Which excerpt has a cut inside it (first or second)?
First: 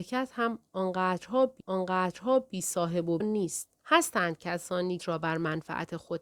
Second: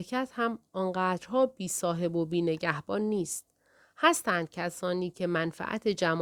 first